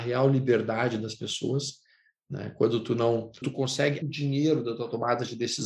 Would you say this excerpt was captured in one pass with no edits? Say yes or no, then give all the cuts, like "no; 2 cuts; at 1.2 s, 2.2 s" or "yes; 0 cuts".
no; 2 cuts; at 3.4 s, 4.0 s